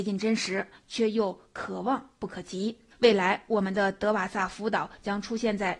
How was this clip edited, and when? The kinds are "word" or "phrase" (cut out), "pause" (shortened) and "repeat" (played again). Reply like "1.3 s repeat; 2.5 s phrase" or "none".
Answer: 2.9 s pause